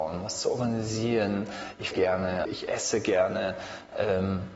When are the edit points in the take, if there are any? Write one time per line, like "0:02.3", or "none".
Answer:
0:01.9
0:02.5